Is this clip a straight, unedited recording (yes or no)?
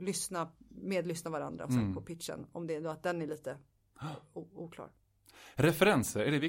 yes